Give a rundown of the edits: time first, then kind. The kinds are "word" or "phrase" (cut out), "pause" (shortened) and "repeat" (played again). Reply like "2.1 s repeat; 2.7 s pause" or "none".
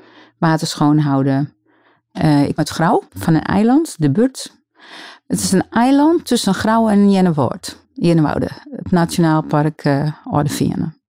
2.6 s word; 3.1 s pause; 7.8 s pause